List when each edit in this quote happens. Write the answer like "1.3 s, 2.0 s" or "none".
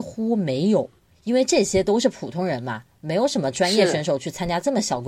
1.0 s